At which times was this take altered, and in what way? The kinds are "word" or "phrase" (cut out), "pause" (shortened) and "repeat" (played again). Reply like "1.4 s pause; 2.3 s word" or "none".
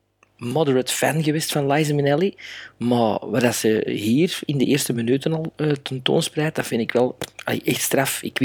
none